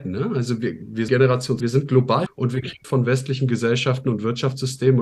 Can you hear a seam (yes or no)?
yes